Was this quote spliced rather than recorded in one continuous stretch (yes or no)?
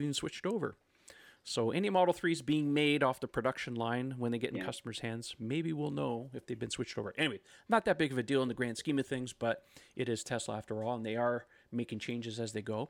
no